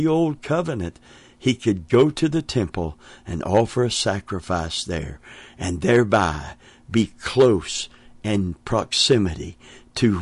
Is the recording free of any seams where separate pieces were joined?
yes; 0 cuts

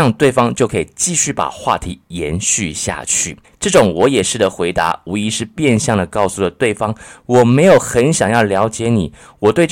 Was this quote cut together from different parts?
yes; 1 cut; at 3.4 s

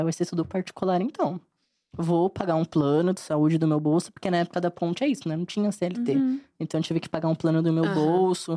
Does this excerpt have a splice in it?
no; 0 cuts

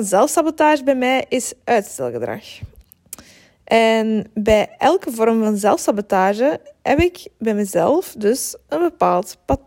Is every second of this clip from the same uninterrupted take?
yes; 0 cuts

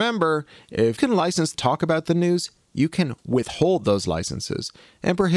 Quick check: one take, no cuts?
no; 2 cuts; at 1.0 s, 1.5 s

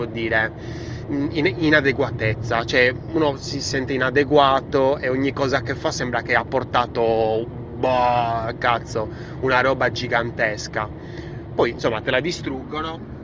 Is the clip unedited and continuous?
yes; 0 cuts

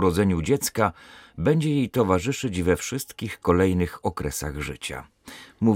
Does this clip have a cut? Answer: no; 0 cuts

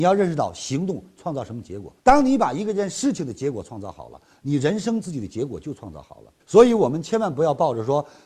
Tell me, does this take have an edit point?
yes; 2 cuts; at 2.0 s, 6.4 s

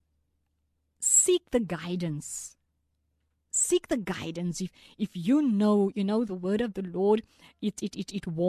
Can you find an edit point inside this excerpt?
no; 0 cuts

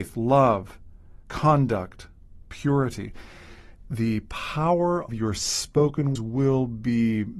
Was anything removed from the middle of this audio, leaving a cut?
yes; 3 cuts; at 3.9 s, 5.1 s, 6.2 s

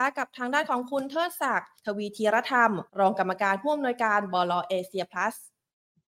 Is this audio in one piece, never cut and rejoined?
no; 2 cuts; at 1.8 s, 2.9 s

